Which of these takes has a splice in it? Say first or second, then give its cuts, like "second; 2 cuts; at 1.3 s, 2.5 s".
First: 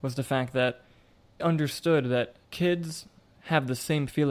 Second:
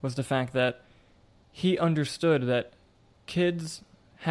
first; 2 cuts; at 1.4 s, 2.4 s